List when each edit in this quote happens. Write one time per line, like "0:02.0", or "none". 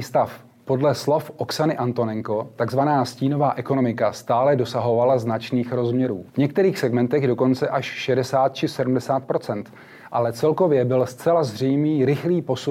0:06.3